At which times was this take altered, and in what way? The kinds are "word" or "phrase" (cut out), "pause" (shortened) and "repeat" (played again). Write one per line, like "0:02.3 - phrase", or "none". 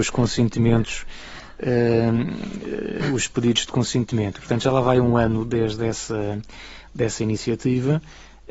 none